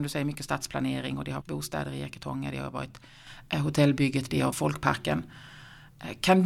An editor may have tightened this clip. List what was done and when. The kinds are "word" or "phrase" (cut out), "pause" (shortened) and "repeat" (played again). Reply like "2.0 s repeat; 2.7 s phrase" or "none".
1.4 s word; 4.5 s word